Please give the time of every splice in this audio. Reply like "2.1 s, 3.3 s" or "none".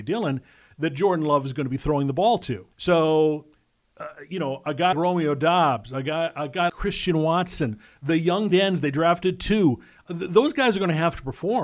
2.7 s, 4.9 s, 6.7 s, 8.5 s